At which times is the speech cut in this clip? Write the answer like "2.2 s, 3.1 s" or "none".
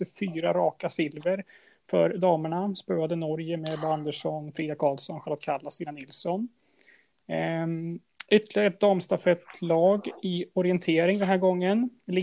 none